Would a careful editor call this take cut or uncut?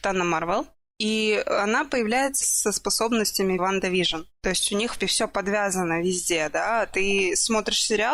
cut